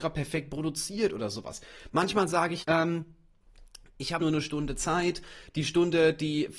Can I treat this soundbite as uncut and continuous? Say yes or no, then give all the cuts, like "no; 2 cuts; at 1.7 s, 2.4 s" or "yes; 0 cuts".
no; 2 cuts; at 2.6 s, 4.2 s